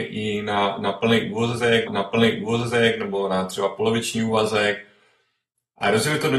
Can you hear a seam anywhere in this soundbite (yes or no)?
yes